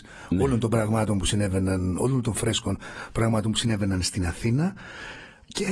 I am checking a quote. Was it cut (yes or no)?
no